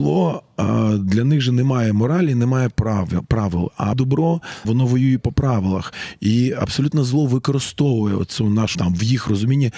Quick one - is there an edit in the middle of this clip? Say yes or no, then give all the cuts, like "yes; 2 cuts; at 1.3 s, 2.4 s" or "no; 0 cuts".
yes; 3 cuts; at 3.9 s, 4.6 s, 8.7 s